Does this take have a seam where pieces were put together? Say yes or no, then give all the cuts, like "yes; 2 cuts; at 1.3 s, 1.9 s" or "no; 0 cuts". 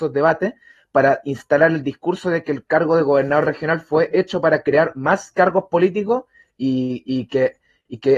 no; 0 cuts